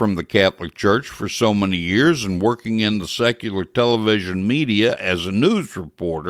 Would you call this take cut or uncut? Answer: uncut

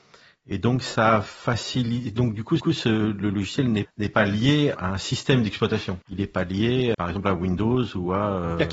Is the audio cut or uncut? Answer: cut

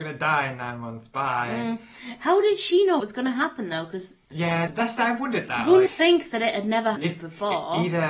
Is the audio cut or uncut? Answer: cut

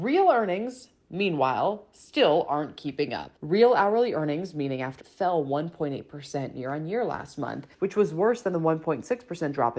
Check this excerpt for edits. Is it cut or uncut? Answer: cut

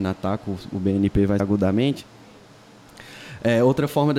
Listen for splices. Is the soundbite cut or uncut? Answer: cut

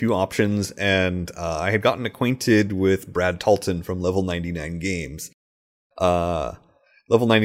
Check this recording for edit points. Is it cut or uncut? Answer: uncut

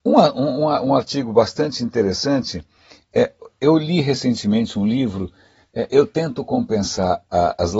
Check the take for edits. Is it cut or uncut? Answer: uncut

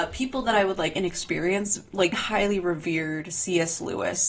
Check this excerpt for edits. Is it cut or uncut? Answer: cut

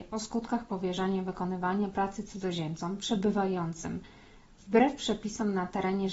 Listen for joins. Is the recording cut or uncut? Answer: uncut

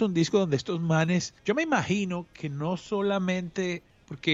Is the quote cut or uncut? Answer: cut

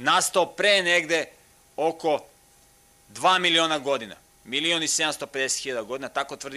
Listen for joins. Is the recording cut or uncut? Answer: uncut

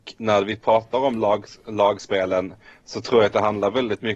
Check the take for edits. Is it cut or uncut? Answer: uncut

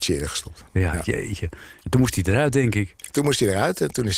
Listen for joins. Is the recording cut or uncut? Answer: uncut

